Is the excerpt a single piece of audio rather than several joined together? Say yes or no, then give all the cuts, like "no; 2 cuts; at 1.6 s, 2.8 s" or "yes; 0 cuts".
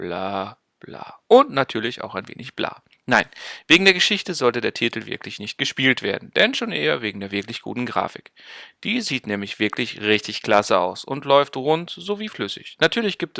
yes; 0 cuts